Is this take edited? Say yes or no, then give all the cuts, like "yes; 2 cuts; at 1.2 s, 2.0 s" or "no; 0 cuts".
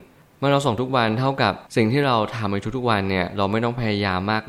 yes; 1 cut; at 1.7 s